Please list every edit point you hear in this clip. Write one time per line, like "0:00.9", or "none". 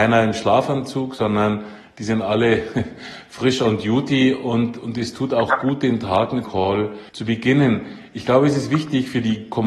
0:06.4
0:07.1